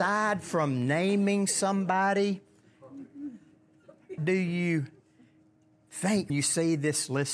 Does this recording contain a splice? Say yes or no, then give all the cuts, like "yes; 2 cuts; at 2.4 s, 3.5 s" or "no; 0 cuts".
yes; 2 cuts; at 4.2 s, 6.3 s